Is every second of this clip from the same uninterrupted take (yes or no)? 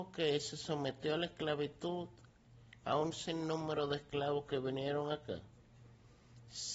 yes